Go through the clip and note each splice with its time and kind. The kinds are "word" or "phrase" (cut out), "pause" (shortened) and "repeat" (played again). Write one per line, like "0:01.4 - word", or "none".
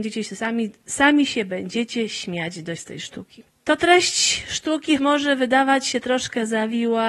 0:02.8 - word
0:05.0 - word